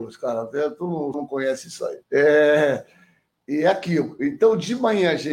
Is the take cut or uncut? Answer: cut